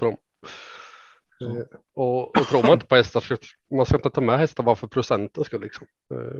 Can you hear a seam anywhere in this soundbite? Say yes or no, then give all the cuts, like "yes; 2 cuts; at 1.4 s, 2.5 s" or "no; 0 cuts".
no; 0 cuts